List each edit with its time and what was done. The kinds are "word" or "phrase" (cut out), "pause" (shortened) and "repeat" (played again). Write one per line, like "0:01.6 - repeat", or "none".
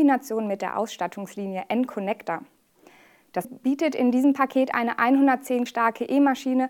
0:03.4 - word
0:05.7 - word